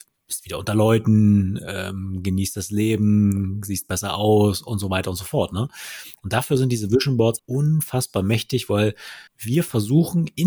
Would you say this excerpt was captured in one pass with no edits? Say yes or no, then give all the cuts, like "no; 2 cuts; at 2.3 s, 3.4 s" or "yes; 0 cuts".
no; 2 cuts; at 7.4 s, 9.3 s